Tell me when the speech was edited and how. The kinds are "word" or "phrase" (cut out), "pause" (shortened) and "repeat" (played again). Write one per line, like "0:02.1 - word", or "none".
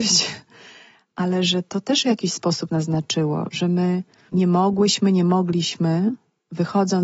0:02.7 - word
0:04.3 - word